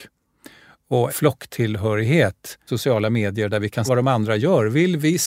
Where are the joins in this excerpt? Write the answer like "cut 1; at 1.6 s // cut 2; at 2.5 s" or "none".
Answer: cut 1; at 1.1 s // cut 2; at 2.7 s // cut 3; at 3.9 s

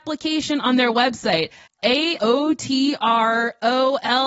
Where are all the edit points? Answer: cut 1; at 1.7 s // cut 2; at 2.2 s

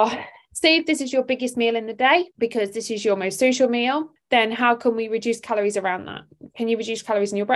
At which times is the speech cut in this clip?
cut 1; at 2.3 s // cut 2; at 4.2 s

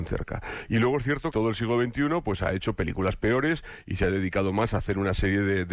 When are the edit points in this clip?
cut 1; at 1.3 s

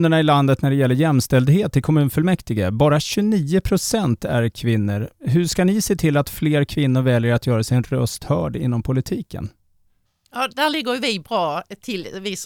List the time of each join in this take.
none

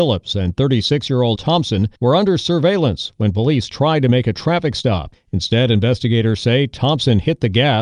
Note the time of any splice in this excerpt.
cut 1; at 1.4 s // cut 2; at 2.0 s

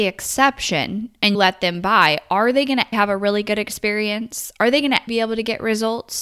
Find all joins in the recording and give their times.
cut 1; at 1.3 s // cut 2; at 2.9 s // cut 3; at 5.1 s

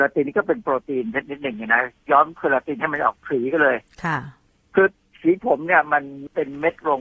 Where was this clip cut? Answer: none

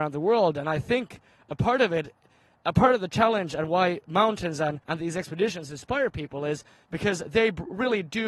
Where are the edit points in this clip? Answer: cut 1; at 4.8 s

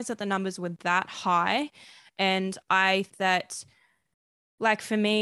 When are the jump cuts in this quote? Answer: cut 1; at 3.1 s

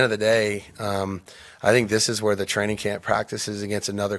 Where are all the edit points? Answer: none

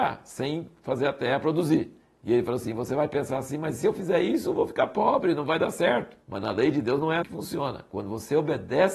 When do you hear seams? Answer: cut 1; at 2.0 s // cut 2; at 6.2 s // cut 3; at 7.2 s

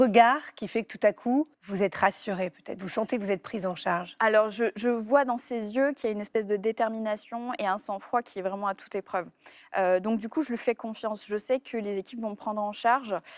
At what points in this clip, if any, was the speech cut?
cut 1; at 1.5 s

